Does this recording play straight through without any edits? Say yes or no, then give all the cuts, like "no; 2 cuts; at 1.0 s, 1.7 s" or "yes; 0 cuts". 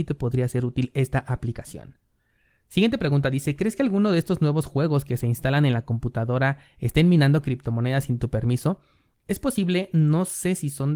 yes; 0 cuts